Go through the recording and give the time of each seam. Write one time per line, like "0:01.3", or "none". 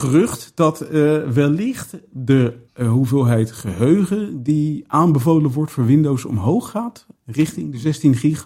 0:02.7
0:07.1